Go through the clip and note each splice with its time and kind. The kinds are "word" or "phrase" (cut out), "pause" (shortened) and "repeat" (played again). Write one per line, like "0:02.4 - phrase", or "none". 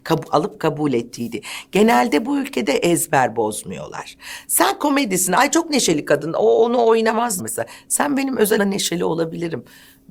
0:02.6 - word
0:07.4 - word
0:08.6 - word